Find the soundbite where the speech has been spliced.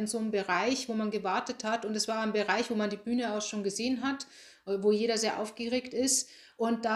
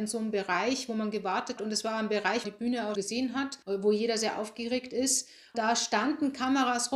second; 5 cuts; at 1.6 s, 2.4 s, 3.0 s, 3.6 s, 5.5 s

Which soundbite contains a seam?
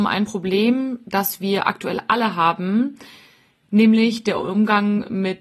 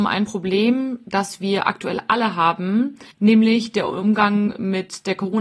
second; 1 cut; at 3.1 s

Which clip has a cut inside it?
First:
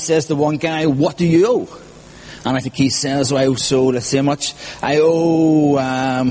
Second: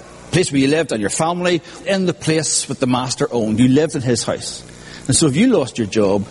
second; 1 cut; at 1.8 s

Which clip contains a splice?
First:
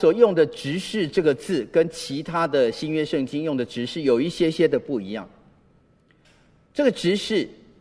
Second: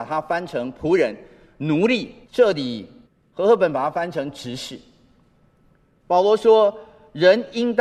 second; 2 cuts; at 2.2 s, 3.0 s

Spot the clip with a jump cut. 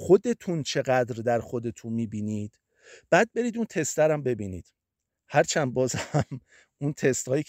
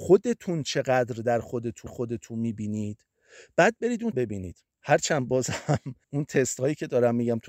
second; 4 cuts; at 1.9 s, 4.1 s, 4.7 s, 6.0 s

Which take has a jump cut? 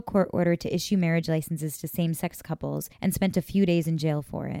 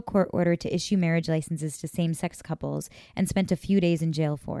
first; 1 cut; at 2.9 s

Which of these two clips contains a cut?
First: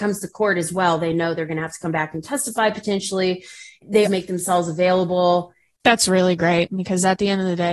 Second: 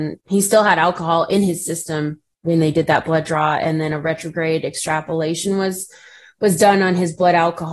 first; 1 cut; at 4.0 s

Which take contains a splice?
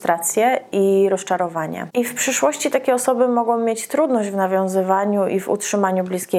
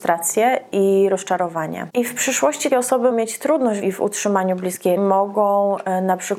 second; 4 cuts; at 2.7 s, 3.1 s, 3.8 s, 5.0 s

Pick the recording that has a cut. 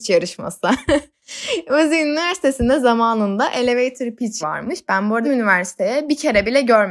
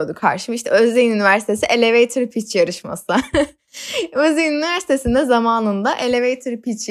first; 2 cuts; at 4.4 s, 5.2 s

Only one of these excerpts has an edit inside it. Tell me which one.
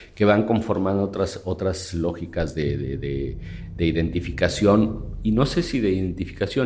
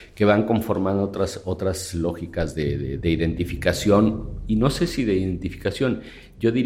second; 1 cut; at 3.0 s

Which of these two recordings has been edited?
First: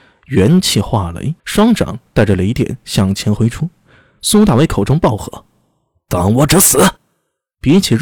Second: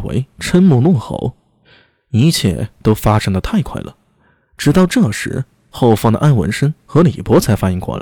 first; 2 cuts; at 1.4 s, 7.0 s

